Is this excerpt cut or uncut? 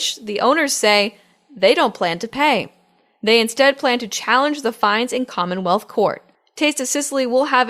uncut